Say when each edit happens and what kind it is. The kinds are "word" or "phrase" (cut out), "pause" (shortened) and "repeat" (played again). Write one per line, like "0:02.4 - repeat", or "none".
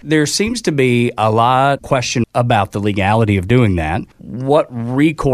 0:01.8 - word
0:02.2 - word
0:04.1 - pause